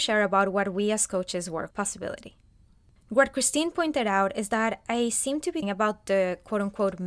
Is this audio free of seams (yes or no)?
no